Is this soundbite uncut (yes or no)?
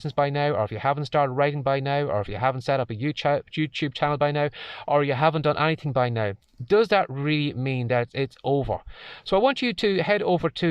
yes